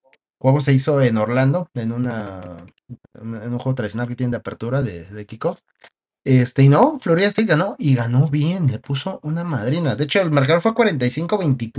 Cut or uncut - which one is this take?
uncut